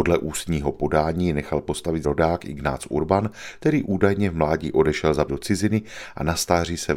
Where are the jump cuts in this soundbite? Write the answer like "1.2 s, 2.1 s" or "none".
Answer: 2.0 s, 5.3 s